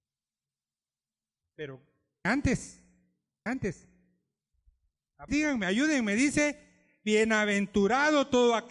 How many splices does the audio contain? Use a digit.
3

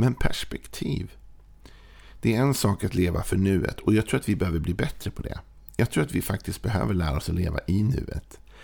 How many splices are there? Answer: 0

